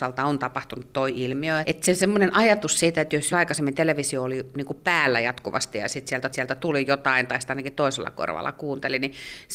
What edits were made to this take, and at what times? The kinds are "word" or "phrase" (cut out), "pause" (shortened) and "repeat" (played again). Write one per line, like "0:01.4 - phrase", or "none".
0:01.6 - word
0:03.3 - word
0:06.3 - repeat